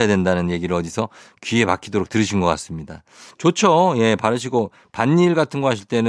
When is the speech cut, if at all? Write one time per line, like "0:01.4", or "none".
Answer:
none